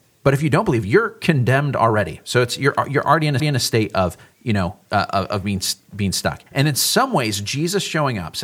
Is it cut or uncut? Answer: cut